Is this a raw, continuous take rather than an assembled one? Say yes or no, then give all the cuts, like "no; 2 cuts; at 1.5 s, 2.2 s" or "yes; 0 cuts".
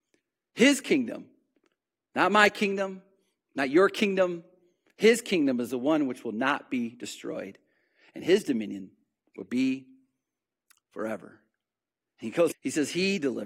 no; 1 cut; at 12.5 s